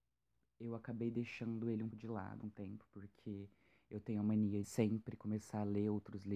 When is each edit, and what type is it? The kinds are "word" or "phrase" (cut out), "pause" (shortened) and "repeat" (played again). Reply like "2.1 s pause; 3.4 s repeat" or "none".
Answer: 1.9 s word; 2.4 s word; 4.6 s word